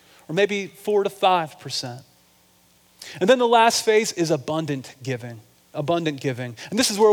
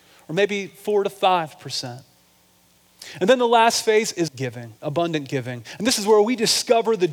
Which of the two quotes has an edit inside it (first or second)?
second